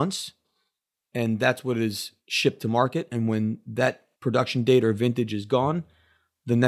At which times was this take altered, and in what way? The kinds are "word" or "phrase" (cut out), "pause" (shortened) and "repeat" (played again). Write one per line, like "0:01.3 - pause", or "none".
0:02.2 - pause
0:04.1 - pause